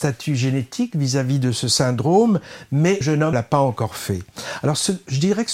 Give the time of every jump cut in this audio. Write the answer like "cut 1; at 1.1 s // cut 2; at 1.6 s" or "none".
cut 1; at 3.0 s // cut 2; at 3.3 s